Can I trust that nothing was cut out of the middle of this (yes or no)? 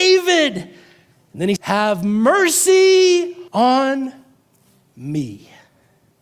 no